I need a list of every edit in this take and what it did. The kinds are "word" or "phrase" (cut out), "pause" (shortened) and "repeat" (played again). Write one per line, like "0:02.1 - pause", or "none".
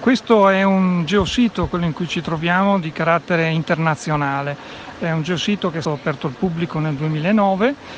0:05.8 - word